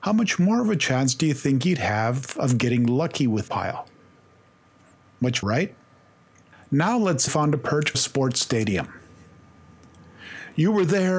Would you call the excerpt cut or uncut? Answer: cut